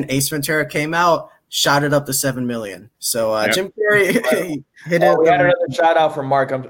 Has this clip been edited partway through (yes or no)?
yes